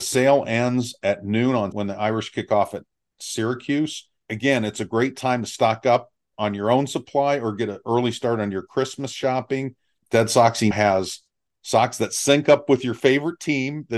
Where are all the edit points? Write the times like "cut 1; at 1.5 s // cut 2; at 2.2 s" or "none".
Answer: cut 1; at 1.7 s // cut 2; at 10.7 s

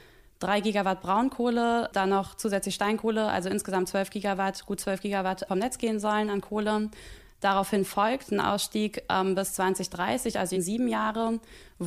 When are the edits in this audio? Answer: cut 1; at 5.5 s // cut 2; at 10.5 s

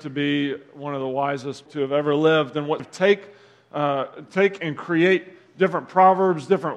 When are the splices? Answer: cut 1; at 1.7 s // cut 2; at 2.8 s

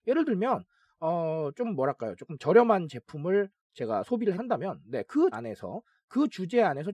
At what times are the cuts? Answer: cut 1; at 4.4 s // cut 2; at 5.3 s

